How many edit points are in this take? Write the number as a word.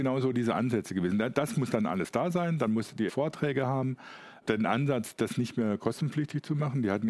two